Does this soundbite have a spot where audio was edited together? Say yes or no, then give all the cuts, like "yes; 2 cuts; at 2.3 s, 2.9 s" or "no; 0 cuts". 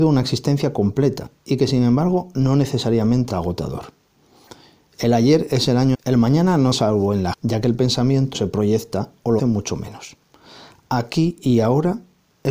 yes; 6 cuts; at 3.3 s, 5.9 s, 6.7 s, 7.3 s, 8.3 s, 9.4 s